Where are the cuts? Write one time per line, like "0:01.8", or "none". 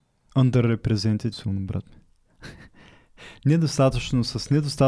0:01.3